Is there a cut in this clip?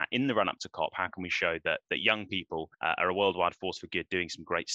yes; 1 cut; at 2.7 s

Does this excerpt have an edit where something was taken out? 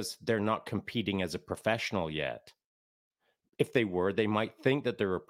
no; 0 cuts

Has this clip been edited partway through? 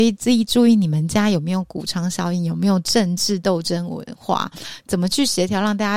no; 0 cuts

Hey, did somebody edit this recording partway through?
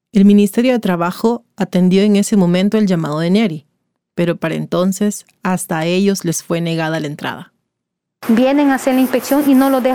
no; 0 cuts

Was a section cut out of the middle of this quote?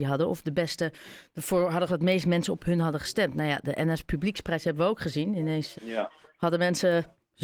yes; 2 cuts; at 1.9 s, 5.7 s

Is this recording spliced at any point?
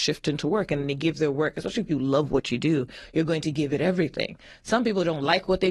no; 0 cuts

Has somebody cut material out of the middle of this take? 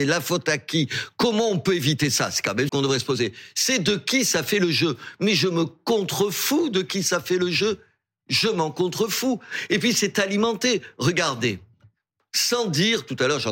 yes; 1 cut; at 2.7 s

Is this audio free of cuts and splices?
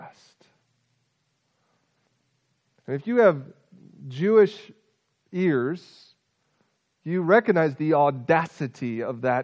yes; 0 cuts

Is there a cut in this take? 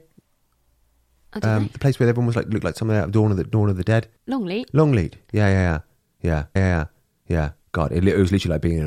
yes; 2 cuts; at 4.2 s, 6.6 s

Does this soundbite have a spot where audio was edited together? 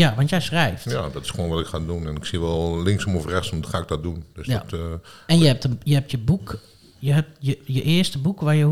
no; 0 cuts

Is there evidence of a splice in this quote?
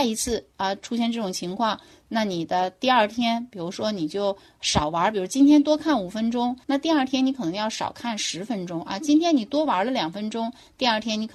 yes; 1 cut; at 6.6 s

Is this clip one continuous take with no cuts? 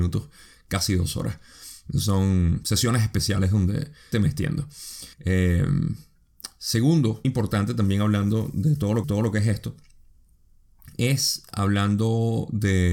no; 4 cuts; at 4.1 s, 5.1 s, 7.2 s, 9.0 s

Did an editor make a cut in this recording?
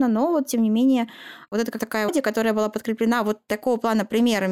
yes; 2 cuts; at 1.8 s, 2.1 s

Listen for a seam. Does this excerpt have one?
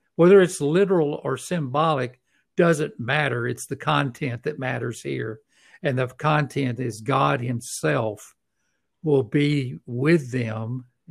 no; 0 cuts

